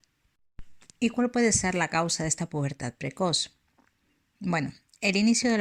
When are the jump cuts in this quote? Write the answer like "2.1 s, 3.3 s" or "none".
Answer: none